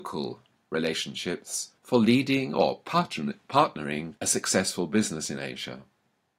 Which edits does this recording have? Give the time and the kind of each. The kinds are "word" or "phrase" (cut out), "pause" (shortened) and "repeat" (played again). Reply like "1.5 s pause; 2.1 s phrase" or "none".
1.8 s pause; 4.2 s pause